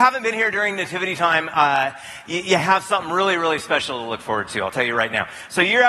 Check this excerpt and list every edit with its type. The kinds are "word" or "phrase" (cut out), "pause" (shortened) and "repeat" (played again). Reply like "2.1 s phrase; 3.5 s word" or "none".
none